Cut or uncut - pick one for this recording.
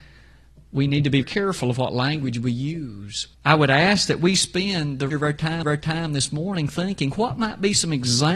cut